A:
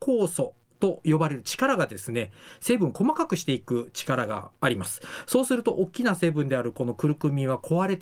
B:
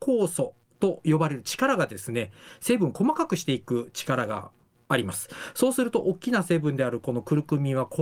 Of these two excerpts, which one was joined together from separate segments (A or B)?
A